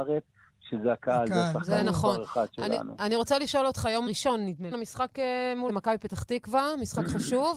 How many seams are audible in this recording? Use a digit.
2